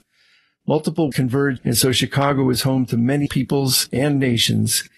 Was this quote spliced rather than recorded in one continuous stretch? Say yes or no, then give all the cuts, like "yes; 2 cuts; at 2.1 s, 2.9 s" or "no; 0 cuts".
yes; 3 cuts; at 1.1 s, 1.6 s, 3.3 s